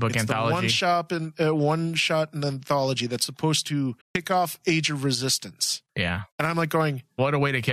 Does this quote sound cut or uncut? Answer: cut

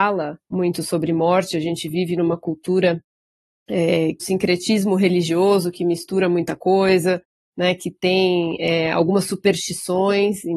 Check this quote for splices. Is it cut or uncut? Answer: cut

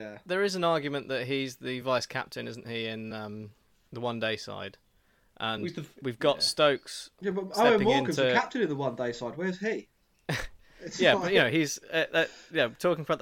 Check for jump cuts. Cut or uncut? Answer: uncut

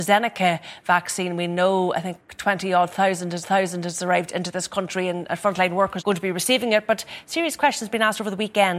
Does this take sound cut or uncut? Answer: cut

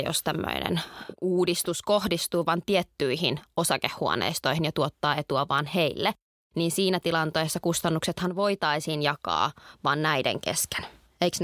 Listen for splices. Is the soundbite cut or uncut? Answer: uncut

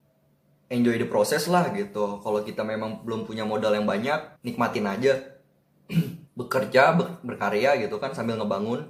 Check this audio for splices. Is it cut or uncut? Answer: cut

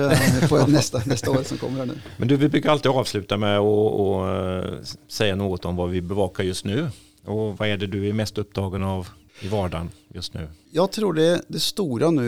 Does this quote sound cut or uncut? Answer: uncut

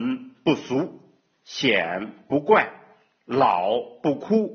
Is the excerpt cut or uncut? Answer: uncut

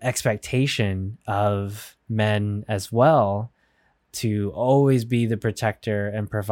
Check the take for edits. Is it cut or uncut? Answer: uncut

